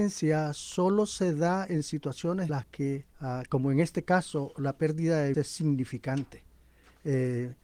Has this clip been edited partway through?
yes; 3 cuts; at 2.5 s, 3.1 s, 5.3 s

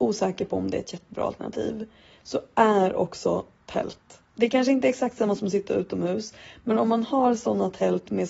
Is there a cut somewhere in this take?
yes; 1 cut; at 4.3 s

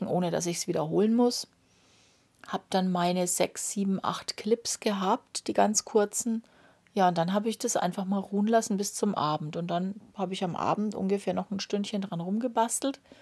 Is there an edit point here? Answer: no; 0 cuts

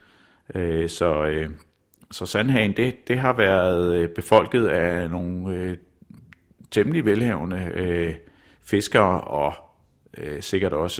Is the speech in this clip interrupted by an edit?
no; 0 cuts

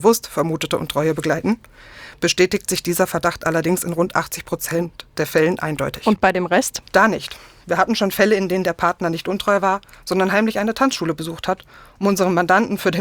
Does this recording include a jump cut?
no; 0 cuts

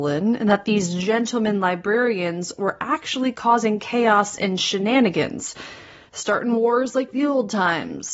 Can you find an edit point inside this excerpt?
no; 0 cuts

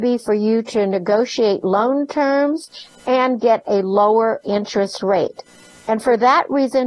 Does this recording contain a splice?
no; 0 cuts

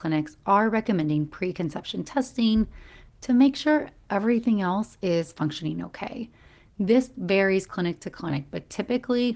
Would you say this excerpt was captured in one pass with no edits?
yes; 0 cuts

